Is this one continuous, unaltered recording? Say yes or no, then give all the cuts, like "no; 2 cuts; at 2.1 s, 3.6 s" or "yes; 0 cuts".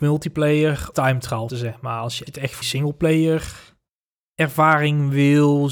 no; 4 cuts; at 0.9 s, 1.5 s, 2.3 s, 2.6 s